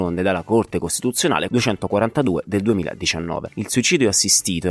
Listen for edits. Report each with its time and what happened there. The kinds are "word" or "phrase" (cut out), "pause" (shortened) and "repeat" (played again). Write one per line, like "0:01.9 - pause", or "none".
0:01.5 - phrase